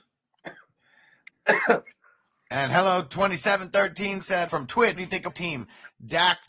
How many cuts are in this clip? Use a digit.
3